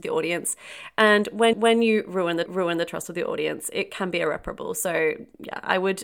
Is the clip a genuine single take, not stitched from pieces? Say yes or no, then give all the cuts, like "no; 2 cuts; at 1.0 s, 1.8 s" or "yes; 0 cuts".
no; 2 cuts; at 1.5 s, 2.5 s